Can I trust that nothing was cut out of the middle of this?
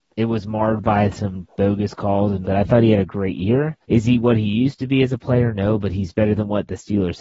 no; 2 cuts; at 2.4 s, 3.8 s

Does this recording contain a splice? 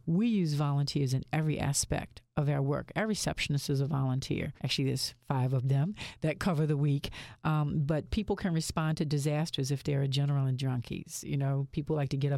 yes; 1 cut; at 4.6 s

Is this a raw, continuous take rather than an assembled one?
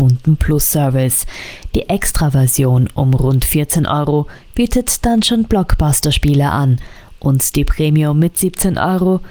yes; 0 cuts

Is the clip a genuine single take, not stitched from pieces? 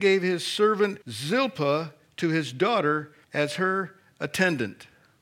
no; 2 cuts; at 1.0 s, 3.2 s

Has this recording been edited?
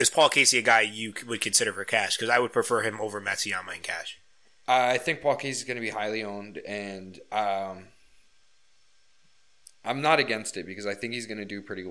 no; 0 cuts

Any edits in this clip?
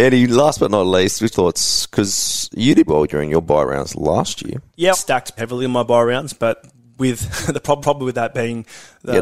yes; 5 cuts; at 1.3 s, 2.9 s, 4.9 s, 5.4 s, 7.8 s

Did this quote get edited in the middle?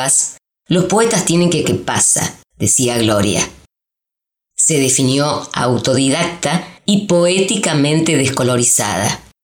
yes; 3 cuts; at 1.6 s, 2.5 s, 6.8 s

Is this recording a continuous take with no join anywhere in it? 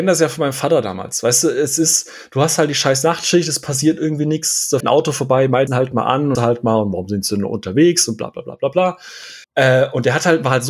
no; 4 cuts; at 4.8 s, 5.7 s, 6.4 s, 9.4 s

